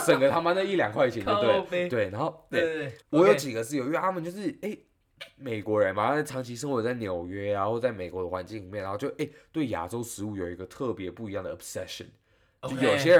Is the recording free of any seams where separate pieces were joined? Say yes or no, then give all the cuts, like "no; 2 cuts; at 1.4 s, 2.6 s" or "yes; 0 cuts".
no; 1 cut; at 3.0 s